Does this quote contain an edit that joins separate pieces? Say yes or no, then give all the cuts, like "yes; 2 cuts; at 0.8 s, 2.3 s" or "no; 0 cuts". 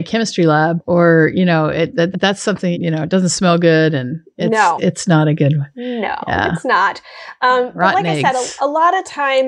yes; 3 cuts; at 2.1 s, 2.7 s, 4.8 s